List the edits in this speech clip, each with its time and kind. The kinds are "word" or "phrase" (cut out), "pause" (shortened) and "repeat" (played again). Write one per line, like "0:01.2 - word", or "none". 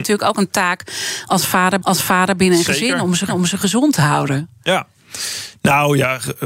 0:01.8 - repeat
0:03.3 - repeat